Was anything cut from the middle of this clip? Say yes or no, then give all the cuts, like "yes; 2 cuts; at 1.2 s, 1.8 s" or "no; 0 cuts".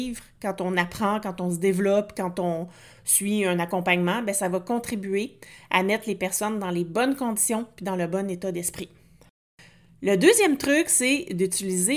no; 0 cuts